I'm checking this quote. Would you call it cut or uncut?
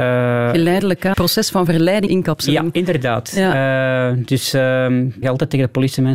cut